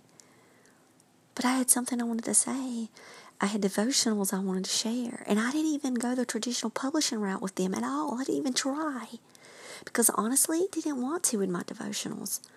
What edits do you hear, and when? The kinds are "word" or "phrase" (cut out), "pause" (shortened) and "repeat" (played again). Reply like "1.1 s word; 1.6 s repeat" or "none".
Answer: 10.7 s word